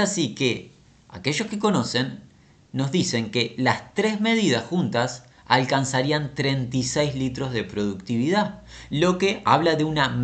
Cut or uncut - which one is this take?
uncut